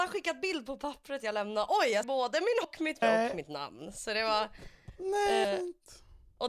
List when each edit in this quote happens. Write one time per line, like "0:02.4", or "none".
0:02.0
0:02.6
0:03.0
0:05.4